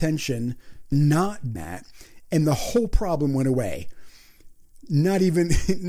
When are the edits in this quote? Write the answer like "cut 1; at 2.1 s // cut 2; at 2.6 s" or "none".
cut 1; at 0.9 s // cut 2; at 1.5 s